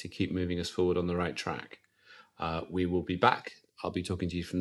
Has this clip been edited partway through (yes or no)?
no